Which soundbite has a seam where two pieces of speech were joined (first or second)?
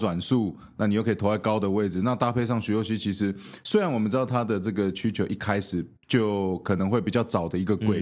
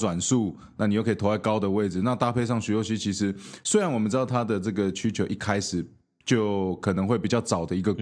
first